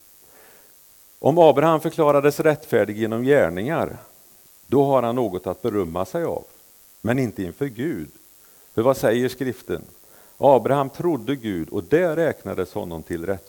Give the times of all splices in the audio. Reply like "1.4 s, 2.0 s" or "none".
none